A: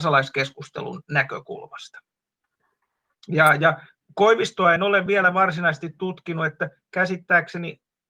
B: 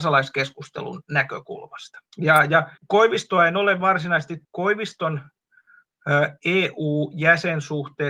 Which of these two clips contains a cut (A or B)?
B